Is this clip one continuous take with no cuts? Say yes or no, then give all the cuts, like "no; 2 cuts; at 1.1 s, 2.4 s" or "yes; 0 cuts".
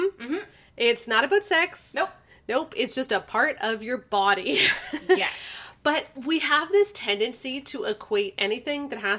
yes; 0 cuts